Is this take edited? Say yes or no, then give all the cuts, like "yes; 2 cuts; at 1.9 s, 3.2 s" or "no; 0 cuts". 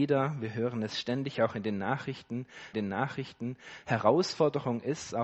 yes; 1 cut; at 2.7 s